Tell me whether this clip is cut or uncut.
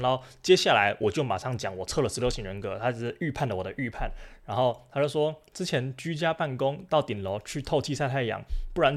uncut